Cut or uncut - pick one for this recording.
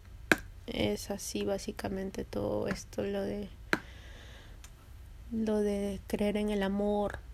uncut